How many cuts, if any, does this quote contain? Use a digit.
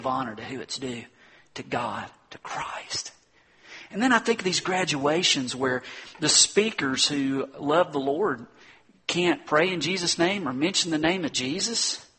0